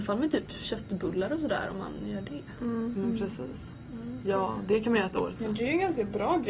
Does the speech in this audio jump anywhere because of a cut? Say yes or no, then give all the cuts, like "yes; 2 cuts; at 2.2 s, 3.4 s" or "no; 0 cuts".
yes; 1 cut; at 5.4 s